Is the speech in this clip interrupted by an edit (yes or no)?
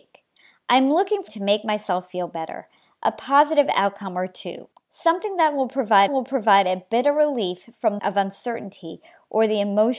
yes